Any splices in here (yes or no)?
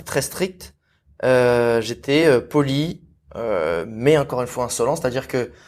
no